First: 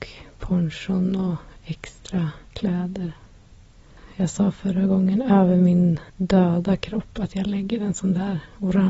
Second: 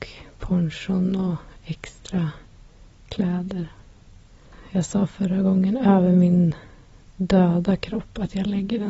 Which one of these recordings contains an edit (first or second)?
first